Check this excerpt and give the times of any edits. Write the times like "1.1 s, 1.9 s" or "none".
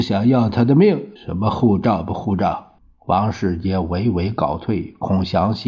1.2 s, 2.8 s